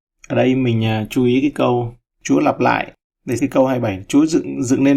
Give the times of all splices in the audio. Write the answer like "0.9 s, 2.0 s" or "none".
3.4 s